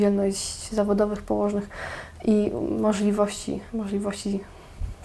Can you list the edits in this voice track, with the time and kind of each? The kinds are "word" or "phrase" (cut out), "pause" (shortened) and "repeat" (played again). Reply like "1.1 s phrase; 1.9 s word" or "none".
3.7 s pause